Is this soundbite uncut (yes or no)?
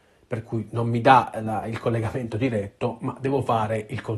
yes